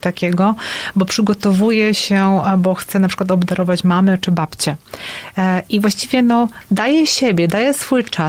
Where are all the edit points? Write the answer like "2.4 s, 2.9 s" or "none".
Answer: none

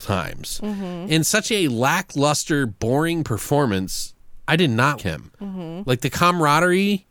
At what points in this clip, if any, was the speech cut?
5.0 s

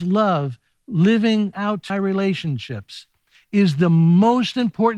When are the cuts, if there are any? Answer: 1.5 s, 1.9 s

